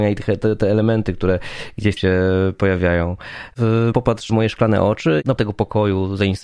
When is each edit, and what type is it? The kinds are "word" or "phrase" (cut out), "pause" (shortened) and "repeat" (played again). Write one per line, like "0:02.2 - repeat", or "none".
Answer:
0:02.0 - word
0:04.3 - word
0:05.4 - word